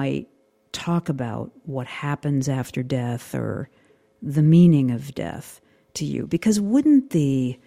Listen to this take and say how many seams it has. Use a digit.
0